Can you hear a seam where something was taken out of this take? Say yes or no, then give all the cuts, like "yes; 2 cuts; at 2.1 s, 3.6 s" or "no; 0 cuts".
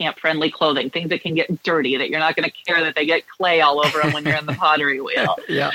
no; 0 cuts